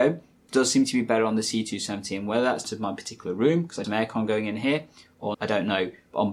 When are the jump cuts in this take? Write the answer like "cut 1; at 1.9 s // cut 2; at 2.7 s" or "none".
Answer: cut 1; at 2.6 s // cut 2; at 3.8 s // cut 3; at 5.3 s